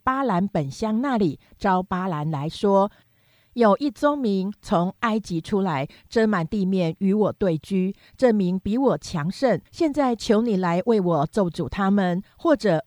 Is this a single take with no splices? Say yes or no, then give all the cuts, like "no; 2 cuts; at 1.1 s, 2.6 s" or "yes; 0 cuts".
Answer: no; 1 cut; at 9.7 s